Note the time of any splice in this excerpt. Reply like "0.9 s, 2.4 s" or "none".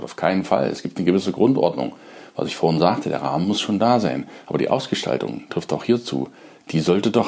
none